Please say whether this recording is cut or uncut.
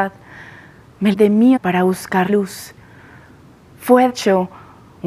cut